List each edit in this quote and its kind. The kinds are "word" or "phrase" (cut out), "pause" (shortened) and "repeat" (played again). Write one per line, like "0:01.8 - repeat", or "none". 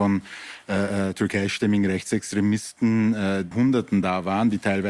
0:03.5 - phrase